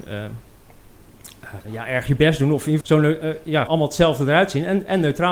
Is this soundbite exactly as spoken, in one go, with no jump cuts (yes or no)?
no